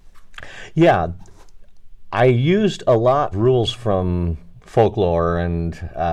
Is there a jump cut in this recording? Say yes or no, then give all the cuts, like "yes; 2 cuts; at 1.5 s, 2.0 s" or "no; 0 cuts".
yes; 1 cut; at 3.3 s